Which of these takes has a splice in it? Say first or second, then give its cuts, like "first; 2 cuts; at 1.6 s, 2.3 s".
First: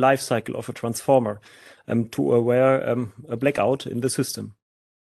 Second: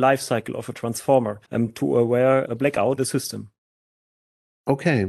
second; 3 cuts; at 1.4 s, 2.4 s, 3.0 s